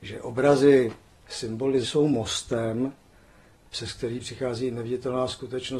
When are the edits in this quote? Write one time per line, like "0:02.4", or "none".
0:01.8